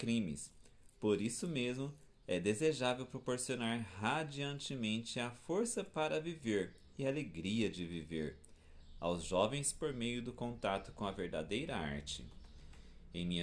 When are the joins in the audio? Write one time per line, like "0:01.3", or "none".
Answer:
none